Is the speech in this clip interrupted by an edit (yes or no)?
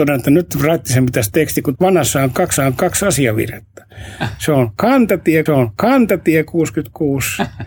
yes